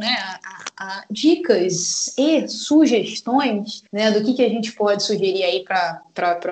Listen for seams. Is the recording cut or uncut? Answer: cut